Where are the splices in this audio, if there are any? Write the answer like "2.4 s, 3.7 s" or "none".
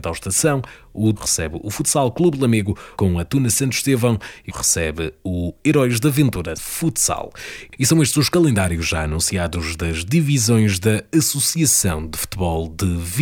1.1 s, 2.9 s, 4.5 s, 6.5 s